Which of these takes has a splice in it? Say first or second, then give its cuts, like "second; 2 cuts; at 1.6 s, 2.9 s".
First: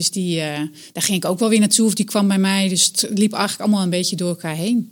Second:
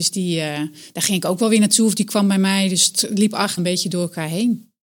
second; 1 cut; at 3.6 s